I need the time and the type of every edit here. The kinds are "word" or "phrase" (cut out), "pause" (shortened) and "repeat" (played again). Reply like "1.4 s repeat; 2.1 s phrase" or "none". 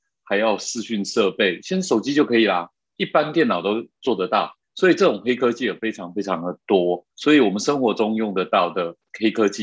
4.6 s pause; 7.1 s pause